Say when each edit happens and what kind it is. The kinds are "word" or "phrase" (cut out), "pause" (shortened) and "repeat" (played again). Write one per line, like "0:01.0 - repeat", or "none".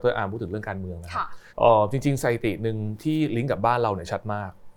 0:01.5 - pause